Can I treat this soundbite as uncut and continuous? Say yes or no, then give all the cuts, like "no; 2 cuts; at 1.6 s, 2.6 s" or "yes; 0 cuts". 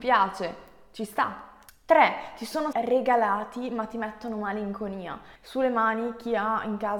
no; 3 cuts; at 1.7 s, 2.7 s, 5.4 s